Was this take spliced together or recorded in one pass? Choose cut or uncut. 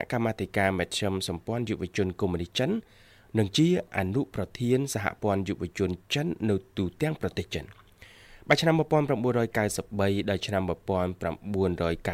uncut